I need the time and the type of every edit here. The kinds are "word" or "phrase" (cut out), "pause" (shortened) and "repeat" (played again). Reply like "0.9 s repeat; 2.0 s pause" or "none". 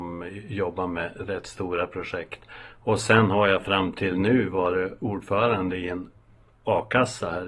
none